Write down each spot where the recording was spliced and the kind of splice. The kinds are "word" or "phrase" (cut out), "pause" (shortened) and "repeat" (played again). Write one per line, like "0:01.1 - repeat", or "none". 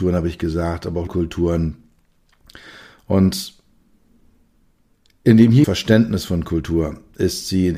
0:01.1 - word
0:05.6 - word